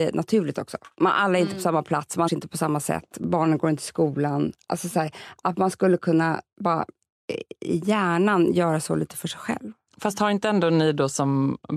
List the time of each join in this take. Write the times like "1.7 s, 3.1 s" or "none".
2.3 s